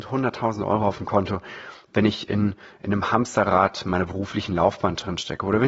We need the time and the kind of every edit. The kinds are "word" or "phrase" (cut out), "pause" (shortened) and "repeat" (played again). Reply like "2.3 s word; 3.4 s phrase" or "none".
none